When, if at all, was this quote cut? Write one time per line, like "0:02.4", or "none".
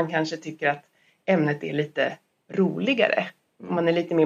none